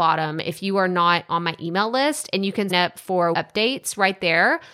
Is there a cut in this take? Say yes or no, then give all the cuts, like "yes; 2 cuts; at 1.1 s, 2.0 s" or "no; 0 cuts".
yes; 3 cuts; at 1.3 s, 2.7 s, 3.3 s